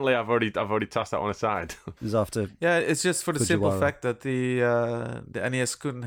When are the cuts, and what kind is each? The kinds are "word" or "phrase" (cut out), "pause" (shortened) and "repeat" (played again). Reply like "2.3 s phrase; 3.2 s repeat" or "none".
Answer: 2.0 s pause